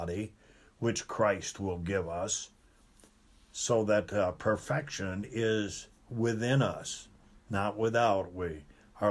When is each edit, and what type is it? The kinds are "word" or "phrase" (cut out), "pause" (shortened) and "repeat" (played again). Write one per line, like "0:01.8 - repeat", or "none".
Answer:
none